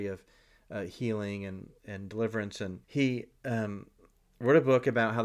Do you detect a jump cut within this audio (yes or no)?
yes